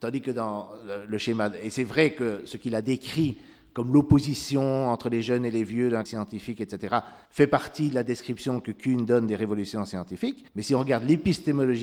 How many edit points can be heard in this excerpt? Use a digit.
3